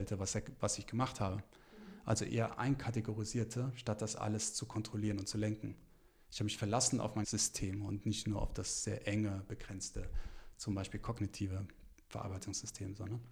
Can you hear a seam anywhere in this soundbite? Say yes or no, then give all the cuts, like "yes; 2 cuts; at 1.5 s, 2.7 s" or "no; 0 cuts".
yes; 1 cut; at 7.2 s